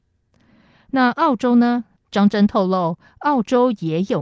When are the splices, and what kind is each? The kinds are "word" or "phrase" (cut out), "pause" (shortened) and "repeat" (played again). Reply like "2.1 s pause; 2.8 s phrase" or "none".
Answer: 2.0 s pause